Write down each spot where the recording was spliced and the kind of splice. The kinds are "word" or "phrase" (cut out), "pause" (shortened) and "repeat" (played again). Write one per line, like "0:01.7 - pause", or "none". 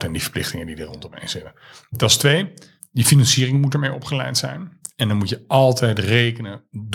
none